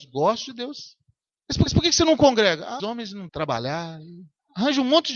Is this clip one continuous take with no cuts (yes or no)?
no